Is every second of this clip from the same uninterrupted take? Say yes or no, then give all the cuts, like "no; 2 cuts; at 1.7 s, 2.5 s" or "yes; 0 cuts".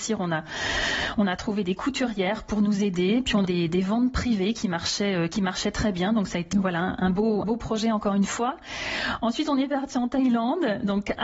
no; 3 cuts; at 3.4 s, 6.5 s, 7.4 s